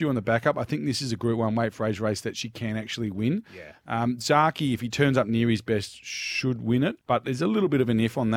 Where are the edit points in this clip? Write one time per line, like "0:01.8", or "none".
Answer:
0:07.0